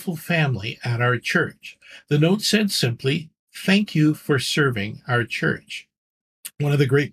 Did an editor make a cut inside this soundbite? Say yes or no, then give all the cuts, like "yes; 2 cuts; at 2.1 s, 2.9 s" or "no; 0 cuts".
no; 0 cuts